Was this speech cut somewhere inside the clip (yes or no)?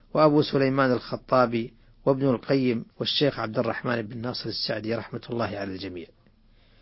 yes